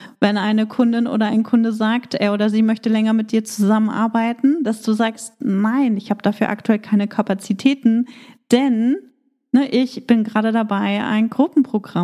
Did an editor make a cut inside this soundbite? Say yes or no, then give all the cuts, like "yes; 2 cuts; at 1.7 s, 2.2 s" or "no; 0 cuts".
no; 0 cuts